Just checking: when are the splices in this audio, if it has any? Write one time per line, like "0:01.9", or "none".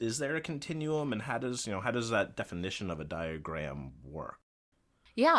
none